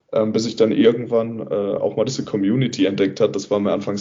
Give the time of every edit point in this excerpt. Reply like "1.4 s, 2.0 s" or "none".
none